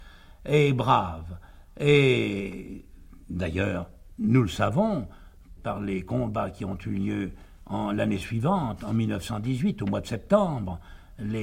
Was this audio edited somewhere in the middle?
no; 0 cuts

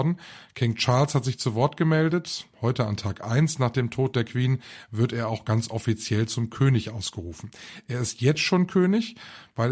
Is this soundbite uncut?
yes; 0 cuts

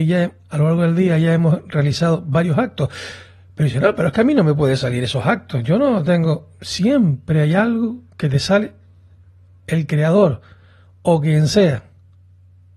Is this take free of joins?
yes; 0 cuts

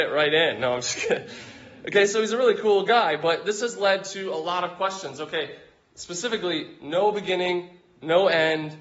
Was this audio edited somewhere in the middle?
no; 0 cuts

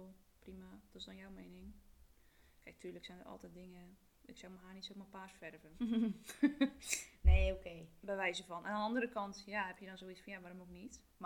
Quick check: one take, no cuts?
yes; 0 cuts

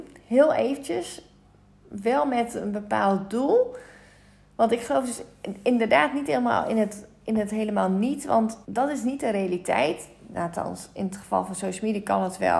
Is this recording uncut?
no; 1 cut; at 8.6 s

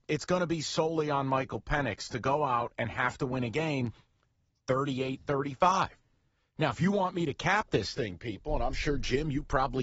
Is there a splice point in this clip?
no; 0 cuts

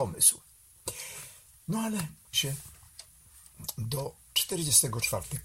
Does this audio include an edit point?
yes; 1 cut; at 2.3 s

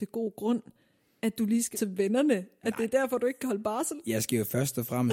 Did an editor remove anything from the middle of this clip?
yes; 1 cut; at 1.7 s

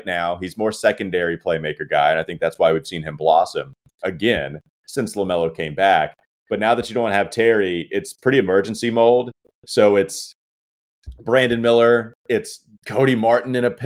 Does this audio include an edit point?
no; 0 cuts

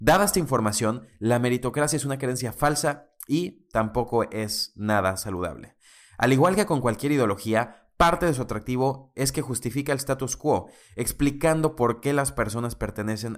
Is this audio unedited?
yes; 0 cuts

